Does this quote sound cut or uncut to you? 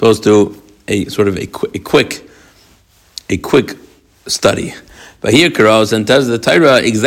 uncut